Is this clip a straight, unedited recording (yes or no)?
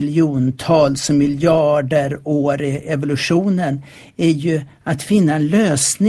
yes